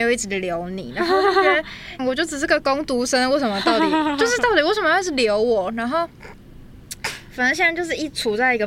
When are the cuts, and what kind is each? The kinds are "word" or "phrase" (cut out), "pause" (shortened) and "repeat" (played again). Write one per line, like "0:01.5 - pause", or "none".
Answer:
0:02.0 - phrase